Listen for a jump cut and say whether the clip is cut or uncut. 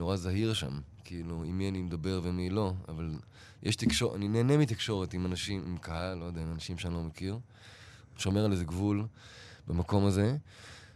uncut